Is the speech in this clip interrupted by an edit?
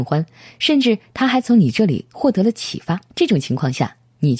yes; 1 cut; at 3.1 s

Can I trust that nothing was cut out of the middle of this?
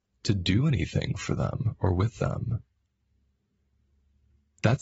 yes; 0 cuts

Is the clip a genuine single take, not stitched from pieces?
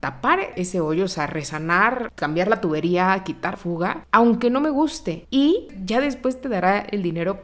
no; 1 cut; at 3.5 s

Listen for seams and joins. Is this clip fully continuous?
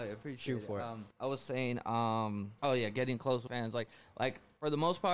no; 3 cuts; at 1.1 s, 2.6 s, 3.5 s

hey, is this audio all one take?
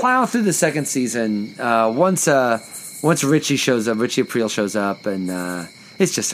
yes; 0 cuts

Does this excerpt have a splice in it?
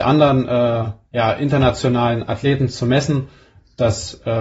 no; 0 cuts

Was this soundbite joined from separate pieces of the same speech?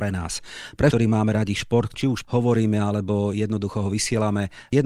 yes; 3 cuts; at 0.9 s, 1.9 s, 2.2 s

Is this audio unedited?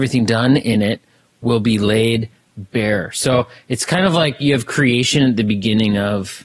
yes; 0 cuts

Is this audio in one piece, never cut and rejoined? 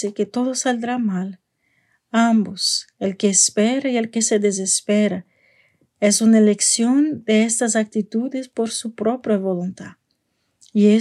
yes; 0 cuts

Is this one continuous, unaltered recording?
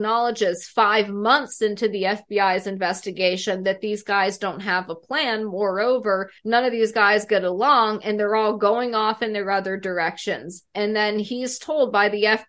no; 2 cuts; at 6.4 s, 10.7 s

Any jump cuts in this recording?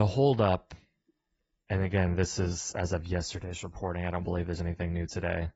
no; 0 cuts

